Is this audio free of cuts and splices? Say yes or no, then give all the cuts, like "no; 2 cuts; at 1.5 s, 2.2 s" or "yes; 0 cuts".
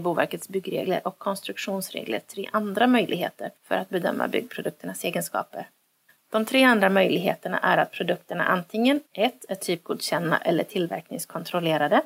no; 3 cuts; at 3.6 s, 6.1 s, 9.1 s